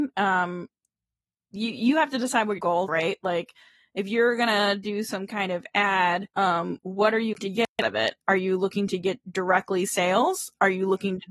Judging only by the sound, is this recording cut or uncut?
cut